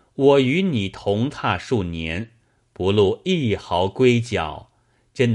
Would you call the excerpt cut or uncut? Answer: uncut